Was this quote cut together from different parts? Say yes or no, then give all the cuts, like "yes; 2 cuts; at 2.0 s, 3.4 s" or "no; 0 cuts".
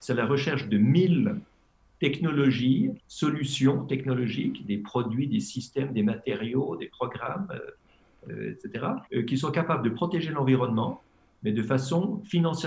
yes; 2 cuts; at 3.0 s, 9.1 s